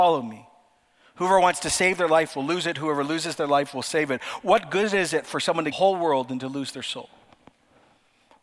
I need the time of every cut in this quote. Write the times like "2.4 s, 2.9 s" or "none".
5.7 s